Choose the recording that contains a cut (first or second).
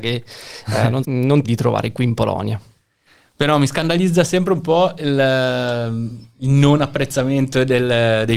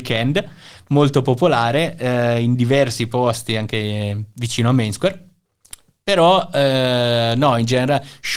first